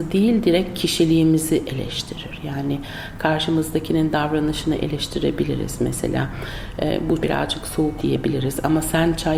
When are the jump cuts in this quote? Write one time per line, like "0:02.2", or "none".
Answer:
0:07.2
0:08.0